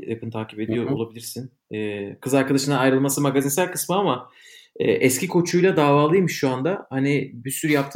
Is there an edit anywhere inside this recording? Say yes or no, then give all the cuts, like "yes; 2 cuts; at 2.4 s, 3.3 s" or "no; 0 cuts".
no; 0 cuts